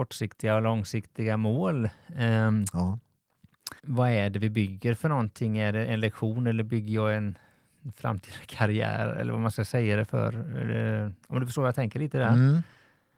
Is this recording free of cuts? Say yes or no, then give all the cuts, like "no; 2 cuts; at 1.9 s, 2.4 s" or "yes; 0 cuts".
no; 2 cuts; at 3.8 s, 11.2 s